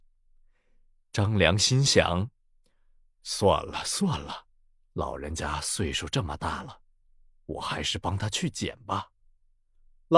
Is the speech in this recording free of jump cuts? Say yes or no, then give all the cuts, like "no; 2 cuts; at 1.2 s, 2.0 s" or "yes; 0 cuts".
yes; 0 cuts